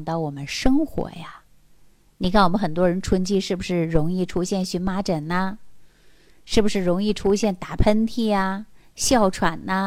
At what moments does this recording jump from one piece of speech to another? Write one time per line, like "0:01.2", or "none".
none